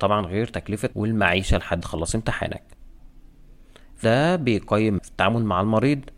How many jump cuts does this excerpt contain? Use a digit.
4